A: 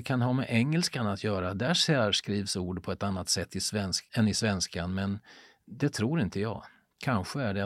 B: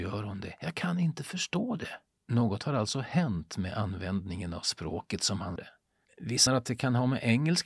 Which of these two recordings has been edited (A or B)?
B